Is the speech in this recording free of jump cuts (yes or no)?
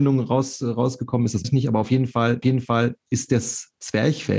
no